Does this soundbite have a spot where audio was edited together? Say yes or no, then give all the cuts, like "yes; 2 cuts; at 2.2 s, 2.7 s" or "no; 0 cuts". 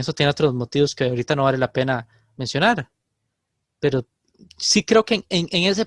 no; 0 cuts